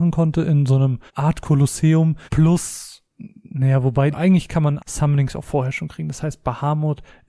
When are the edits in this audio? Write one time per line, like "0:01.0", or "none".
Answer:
0:01.1
0:02.3
0:04.1
0:04.8